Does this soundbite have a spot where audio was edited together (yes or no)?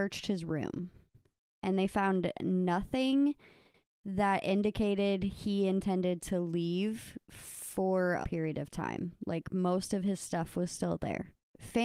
yes